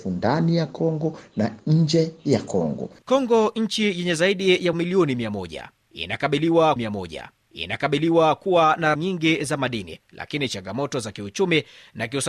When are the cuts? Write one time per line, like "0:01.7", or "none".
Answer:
0:03.0
0:04.7
0:06.8
0:08.9